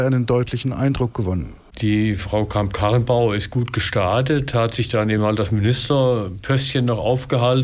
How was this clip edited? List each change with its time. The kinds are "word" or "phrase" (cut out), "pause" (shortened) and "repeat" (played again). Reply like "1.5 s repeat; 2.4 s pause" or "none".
none